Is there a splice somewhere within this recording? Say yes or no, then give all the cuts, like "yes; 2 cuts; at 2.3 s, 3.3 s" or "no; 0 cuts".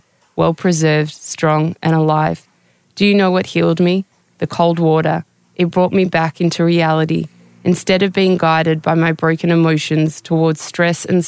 no; 0 cuts